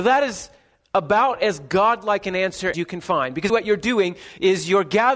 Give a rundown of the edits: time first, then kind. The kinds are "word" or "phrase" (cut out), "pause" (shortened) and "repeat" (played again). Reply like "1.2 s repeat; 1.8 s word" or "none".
2.7 s word; 3.5 s word

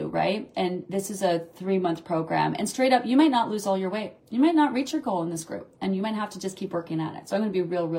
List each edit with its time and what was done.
4.2 s pause

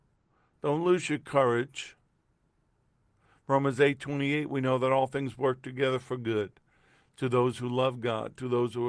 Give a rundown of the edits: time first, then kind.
none

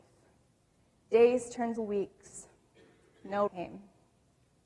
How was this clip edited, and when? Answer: 1.8 s word; 3.5 s word

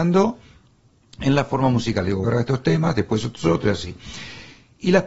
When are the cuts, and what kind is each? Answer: 2.2 s word

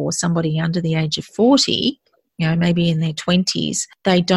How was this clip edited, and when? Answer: none

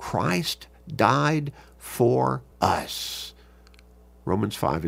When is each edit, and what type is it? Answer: 2.5 s pause

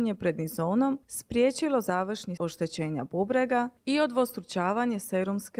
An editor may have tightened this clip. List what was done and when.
2.4 s word

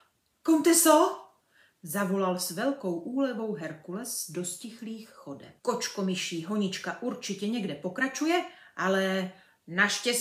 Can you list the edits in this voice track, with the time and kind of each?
5.6 s pause

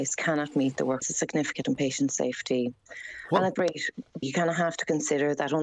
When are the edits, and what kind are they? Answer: 1.0 s phrase; 1.6 s word; 3.6 s word; 4.2 s word

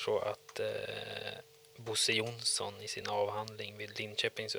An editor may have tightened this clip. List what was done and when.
none

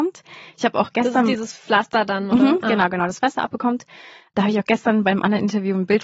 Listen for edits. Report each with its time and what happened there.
none

